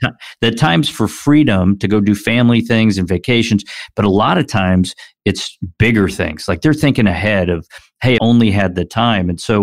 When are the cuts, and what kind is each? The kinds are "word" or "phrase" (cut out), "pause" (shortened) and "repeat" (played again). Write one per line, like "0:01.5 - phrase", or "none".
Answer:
0:08.2 - phrase